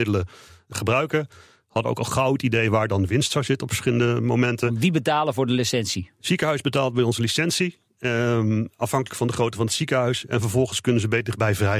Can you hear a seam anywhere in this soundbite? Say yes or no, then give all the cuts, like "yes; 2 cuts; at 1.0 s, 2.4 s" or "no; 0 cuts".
no; 0 cuts